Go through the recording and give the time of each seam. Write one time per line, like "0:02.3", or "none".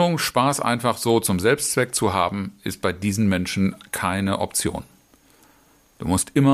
none